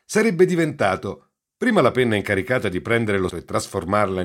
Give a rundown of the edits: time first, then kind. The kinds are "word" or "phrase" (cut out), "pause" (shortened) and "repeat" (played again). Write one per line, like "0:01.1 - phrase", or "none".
0:03.3 - word